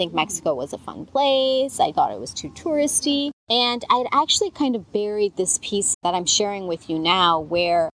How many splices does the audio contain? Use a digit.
4